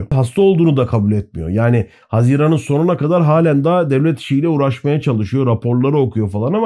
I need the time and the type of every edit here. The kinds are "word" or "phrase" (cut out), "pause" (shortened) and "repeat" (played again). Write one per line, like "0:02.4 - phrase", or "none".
none